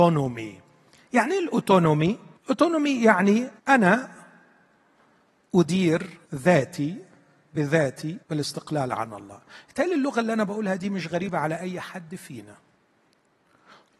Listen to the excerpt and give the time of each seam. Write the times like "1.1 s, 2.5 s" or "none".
2.4 s, 3.6 s, 6.2 s, 8.2 s